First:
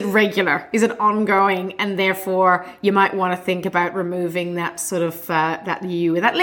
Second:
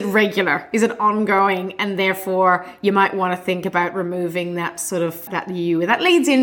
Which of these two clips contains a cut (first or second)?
second